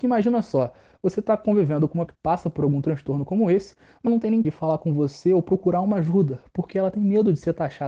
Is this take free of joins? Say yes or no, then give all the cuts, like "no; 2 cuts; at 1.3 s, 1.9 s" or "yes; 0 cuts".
no; 3 cuts; at 2.1 s, 4.1 s, 4.4 s